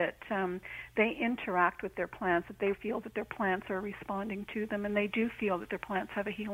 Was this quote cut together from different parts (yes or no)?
yes